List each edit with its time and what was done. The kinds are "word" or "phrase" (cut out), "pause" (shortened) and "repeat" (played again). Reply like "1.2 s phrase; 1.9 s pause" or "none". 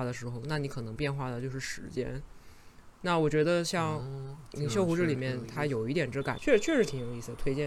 6.4 s word